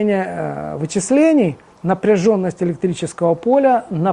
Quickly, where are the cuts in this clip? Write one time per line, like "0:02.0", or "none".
0:01.7